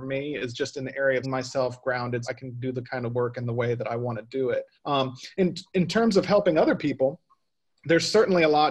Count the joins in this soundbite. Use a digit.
3